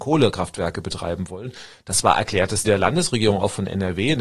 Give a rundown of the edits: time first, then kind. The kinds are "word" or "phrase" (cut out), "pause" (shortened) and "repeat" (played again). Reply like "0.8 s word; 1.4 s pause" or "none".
2.6 s word